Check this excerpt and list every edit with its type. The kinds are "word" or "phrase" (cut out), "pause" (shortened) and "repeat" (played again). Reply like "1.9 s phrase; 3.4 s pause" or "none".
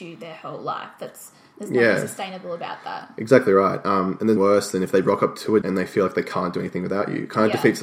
4.4 s word; 5.6 s word